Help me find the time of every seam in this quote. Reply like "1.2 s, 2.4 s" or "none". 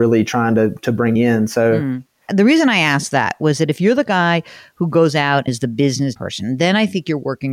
1.2 s, 5.5 s, 6.2 s